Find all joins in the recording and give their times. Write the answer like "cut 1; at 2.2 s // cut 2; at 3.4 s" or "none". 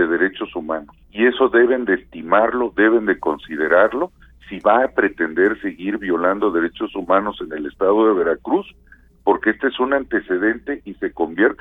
cut 1; at 1.0 s